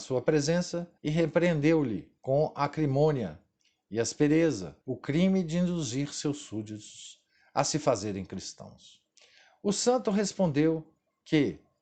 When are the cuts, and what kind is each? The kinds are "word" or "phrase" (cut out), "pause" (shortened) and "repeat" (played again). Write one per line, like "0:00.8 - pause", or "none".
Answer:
0:01.0 - pause
0:02.2 - pause
0:04.8 - pause

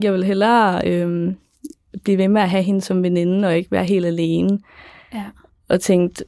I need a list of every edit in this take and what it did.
none

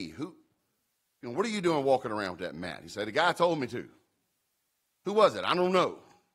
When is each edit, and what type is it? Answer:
none

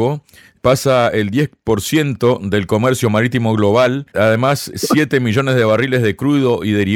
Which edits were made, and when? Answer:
0:04.1 - pause

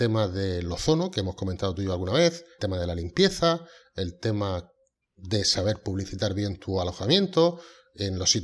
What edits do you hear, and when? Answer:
0:02.6 - word

